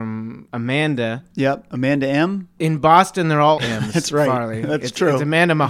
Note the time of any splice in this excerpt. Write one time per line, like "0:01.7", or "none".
0:03.6